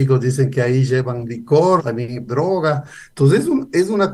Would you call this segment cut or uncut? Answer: cut